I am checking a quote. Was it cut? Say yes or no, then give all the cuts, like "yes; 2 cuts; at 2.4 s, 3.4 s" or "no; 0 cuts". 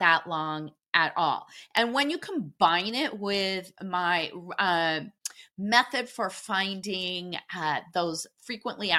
no; 0 cuts